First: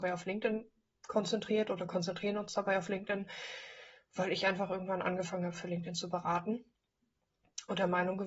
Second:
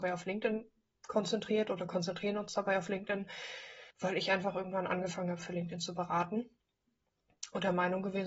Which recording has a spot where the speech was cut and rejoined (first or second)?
second